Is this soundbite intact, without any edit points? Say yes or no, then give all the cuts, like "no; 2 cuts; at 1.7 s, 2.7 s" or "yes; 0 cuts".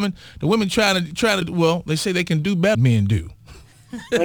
no; 2 cuts; at 1.4 s, 2.7 s